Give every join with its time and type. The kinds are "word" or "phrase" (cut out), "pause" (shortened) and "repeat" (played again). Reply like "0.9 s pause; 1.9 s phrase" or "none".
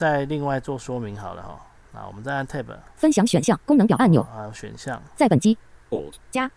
3.6 s pause